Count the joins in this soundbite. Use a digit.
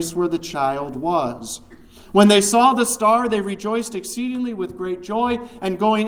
0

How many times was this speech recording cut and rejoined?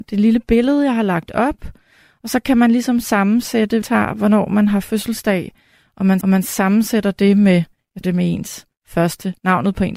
3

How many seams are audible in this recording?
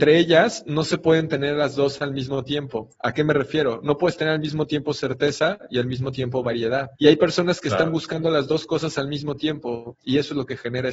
1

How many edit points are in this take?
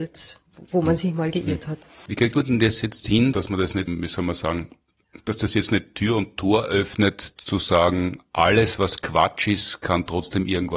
0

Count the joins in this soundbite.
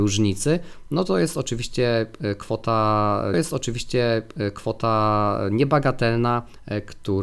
1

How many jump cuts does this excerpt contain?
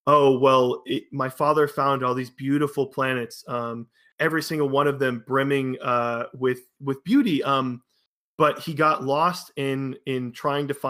0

